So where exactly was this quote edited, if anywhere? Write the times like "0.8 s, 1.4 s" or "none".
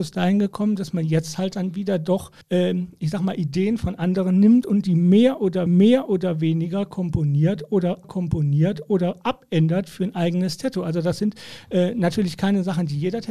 2.4 s, 5.7 s, 8.0 s